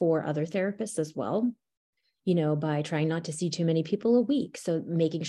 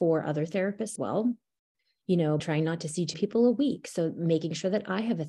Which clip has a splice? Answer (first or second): second